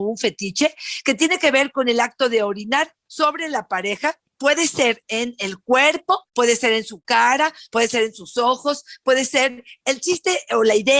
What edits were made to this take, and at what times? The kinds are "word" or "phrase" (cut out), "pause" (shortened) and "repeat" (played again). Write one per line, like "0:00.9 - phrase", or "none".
0:06.3 - pause

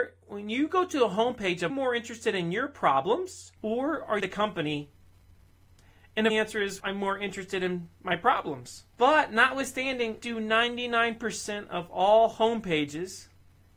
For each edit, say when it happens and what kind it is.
0:01.7 - phrase
0:03.6 - pause
0:04.2 - phrase
0:06.3 - phrase
0:06.8 - word
0:08.9 - pause
0:10.2 - word

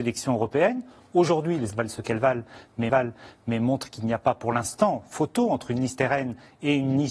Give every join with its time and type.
0:01.7 - word
0:02.9 - repeat

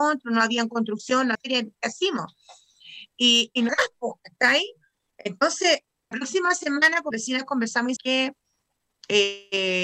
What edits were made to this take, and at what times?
0:01.3 - word
0:03.7 - word
0:06.1 - word
0:07.1 - word
0:08.0 - word

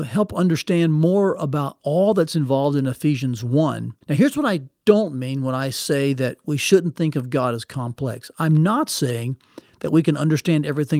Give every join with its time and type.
0:04.0 - pause

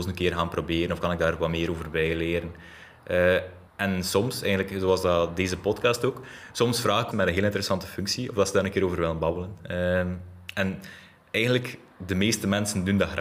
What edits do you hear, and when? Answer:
0:03.7 - pause
0:07.1 - phrase

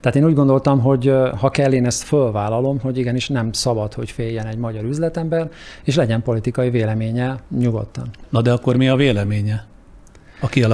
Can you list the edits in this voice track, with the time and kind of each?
0:07.5 - pause

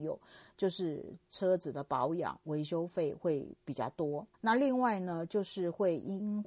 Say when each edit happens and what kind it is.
0:04.3 - pause

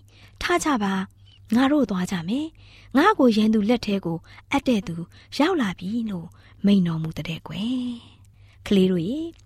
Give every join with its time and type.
none

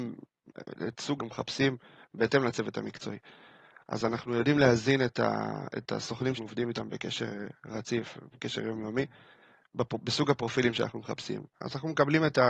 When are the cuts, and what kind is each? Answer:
0:01.2 - phrase
0:06.3 - word

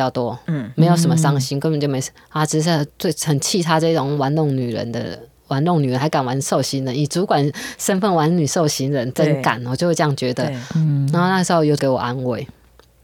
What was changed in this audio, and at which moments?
none

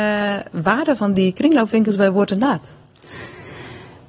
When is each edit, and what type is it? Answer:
none

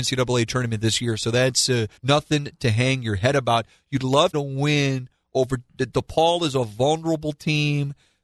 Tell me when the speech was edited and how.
0:02.0 - pause
0:04.3 - phrase

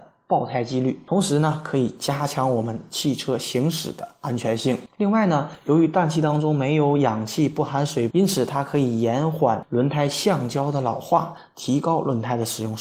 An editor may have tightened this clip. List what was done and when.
0:08.1 - phrase

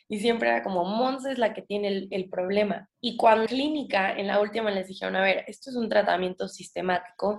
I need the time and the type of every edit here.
0:02.9 - pause
0:03.5 - phrase

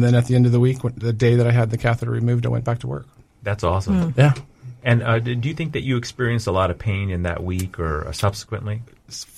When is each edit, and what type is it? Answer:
none

